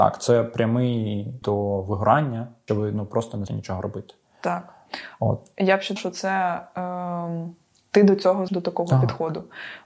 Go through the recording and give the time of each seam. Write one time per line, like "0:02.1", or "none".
0:01.4
0:02.7
0:03.5
0:06.0
0:08.5

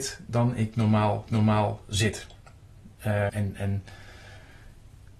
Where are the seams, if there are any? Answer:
0:01.3
0:03.3

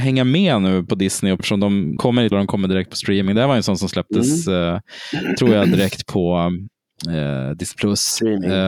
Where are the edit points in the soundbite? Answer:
0:01.4
0:02.0
0:02.3

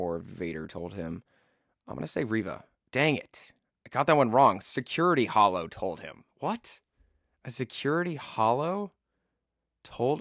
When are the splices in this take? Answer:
none

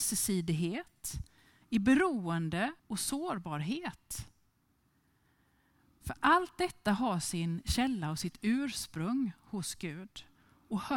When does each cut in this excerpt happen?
0:02.8

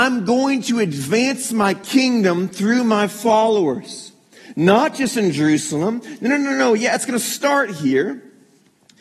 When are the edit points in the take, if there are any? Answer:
none

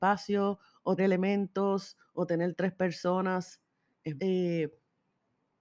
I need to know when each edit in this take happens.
0:01.0
0:04.2

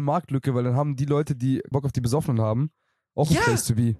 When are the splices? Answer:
0:01.7

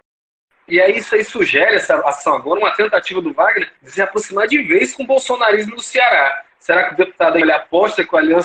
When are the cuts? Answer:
0:03.8
0:07.4

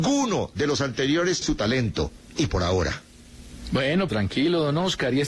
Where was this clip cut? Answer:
0:01.4
0:02.5
0:04.1

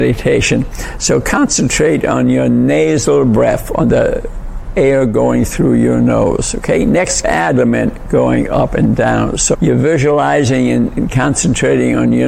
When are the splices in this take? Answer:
0:07.2
0:09.5

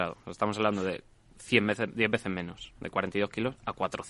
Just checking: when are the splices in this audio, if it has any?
none

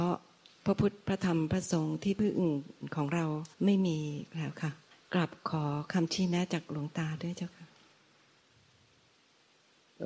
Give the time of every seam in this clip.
0:03.5
0:04.9

